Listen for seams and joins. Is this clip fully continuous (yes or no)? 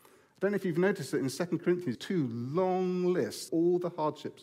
no